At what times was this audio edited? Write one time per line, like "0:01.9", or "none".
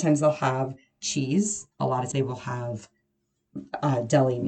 0:01.7
0:02.1